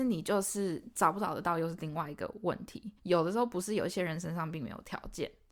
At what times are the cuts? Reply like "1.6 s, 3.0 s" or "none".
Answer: 3.0 s